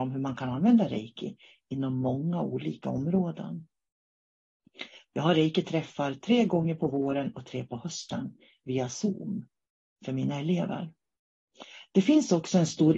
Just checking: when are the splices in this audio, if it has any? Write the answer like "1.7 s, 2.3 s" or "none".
none